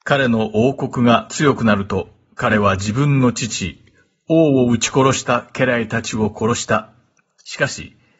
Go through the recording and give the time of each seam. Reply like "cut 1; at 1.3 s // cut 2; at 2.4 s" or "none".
none